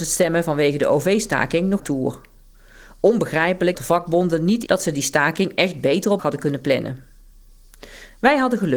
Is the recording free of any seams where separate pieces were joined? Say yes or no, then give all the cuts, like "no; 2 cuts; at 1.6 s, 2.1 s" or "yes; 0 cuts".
no; 4 cuts; at 1.8 s, 3.7 s, 4.7 s, 6.2 s